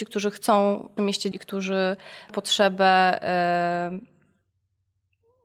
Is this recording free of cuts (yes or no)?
no